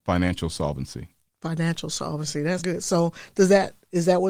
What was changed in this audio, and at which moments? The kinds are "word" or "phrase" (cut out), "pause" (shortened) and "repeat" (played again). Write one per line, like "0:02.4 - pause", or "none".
0:02.6 - word